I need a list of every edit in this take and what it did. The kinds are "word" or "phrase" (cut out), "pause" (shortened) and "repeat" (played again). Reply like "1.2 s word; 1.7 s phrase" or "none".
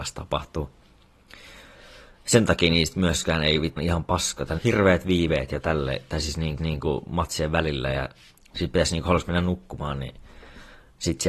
3.8 s phrase; 4.6 s word; 6.6 s repeat; 8.3 s pause